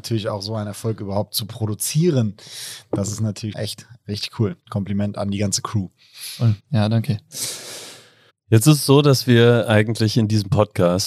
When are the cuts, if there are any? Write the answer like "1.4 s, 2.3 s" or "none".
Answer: 3.5 s, 4.6 s, 6.6 s, 8.3 s